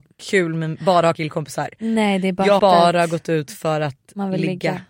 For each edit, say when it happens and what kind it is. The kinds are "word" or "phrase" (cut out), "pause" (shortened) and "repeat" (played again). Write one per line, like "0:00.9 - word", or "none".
0:01.1 - phrase
0:02.6 - word

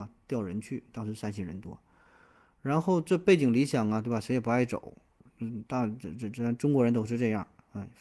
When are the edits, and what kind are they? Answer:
none

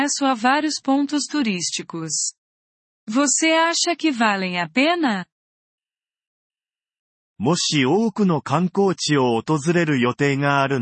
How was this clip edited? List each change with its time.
none

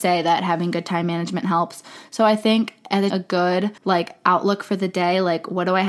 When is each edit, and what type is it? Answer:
0:03.1 - phrase
0:03.8 - pause

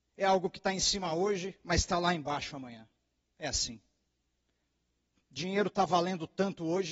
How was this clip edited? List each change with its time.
none

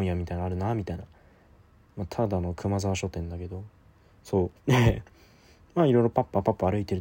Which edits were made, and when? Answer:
0:04.6 - pause

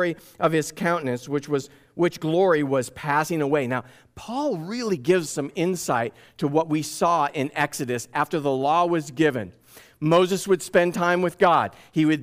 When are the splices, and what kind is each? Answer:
0:05.3 - word

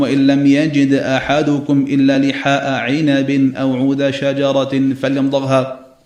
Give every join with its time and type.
none

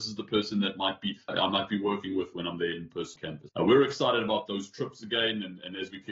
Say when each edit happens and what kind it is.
0:01.3 - word
0:03.2 - word
0:03.5 - word

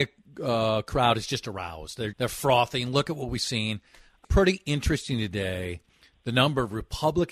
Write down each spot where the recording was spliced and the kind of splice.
0:02.1 - word
0:04.2 - phrase

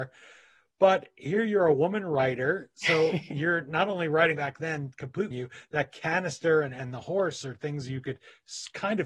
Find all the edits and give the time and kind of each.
0:04.3 - phrase
0:05.3 - phrase

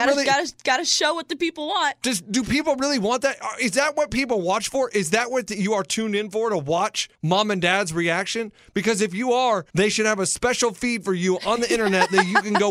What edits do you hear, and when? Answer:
0:07.1 - pause
0:09.7 - pause

